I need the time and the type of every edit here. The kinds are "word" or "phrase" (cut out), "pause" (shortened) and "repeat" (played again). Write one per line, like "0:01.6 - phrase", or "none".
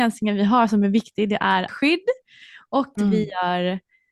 0:01.7 - word
0:03.0 - word